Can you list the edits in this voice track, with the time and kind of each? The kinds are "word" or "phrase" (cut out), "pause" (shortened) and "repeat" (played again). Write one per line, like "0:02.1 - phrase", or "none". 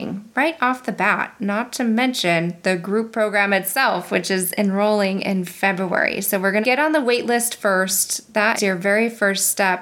0:06.6 - word
0:08.6 - word